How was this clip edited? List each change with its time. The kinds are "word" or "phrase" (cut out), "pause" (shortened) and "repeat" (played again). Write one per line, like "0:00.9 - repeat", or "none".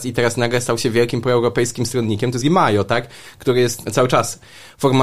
0:02.4 - word
0:03.8 - word